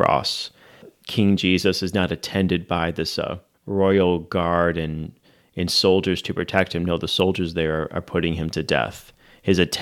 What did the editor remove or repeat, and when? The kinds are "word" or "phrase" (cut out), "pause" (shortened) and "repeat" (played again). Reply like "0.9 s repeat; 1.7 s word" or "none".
none